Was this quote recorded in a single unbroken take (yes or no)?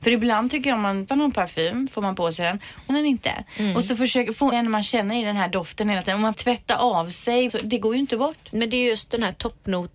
no